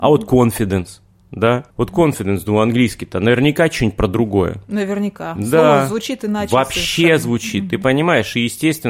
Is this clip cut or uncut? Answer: cut